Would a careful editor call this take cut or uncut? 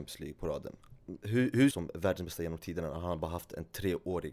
cut